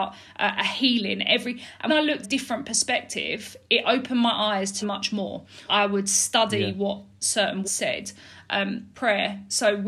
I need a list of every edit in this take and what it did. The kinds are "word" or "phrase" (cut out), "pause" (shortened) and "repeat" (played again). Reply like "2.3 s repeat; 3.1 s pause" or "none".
1.9 s word; 2.2 s phrase; 4.8 s word; 5.7 s word; 7.6 s word; 8.9 s phrase